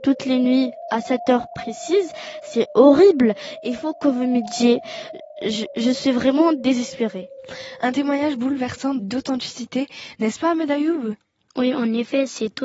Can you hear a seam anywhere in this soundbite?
no; 0 cuts

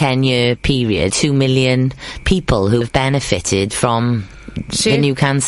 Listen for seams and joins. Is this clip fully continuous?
no; 2 cuts; at 1.1 s, 2.8 s

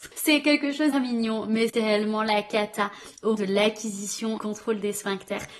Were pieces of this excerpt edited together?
yes; 4 cuts; at 0.9 s, 1.7 s, 3.3 s, 4.4 s

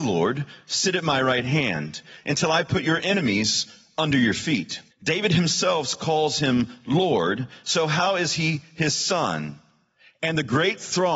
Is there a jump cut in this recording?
yes; 1 cut; at 4.9 s

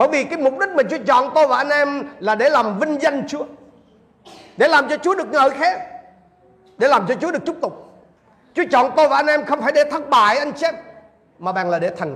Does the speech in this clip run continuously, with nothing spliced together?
yes; 0 cuts

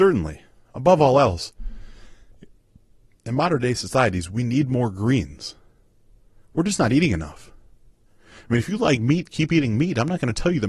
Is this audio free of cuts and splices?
yes; 0 cuts

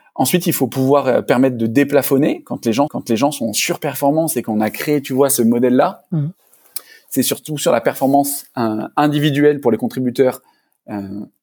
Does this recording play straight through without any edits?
no; 1 cut; at 2.9 s

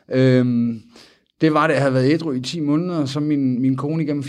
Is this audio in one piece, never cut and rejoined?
yes; 0 cuts

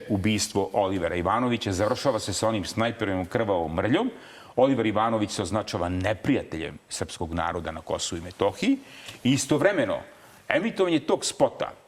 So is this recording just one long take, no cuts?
yes; 0 cuts

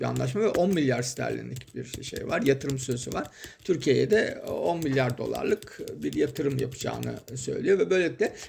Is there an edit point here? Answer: no; 0 cuts

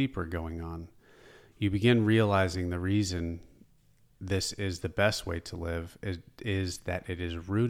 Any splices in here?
no; 0 cuts

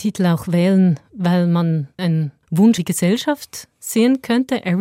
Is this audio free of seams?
no; 2 cuts; at 2.0 s, 2.8 s

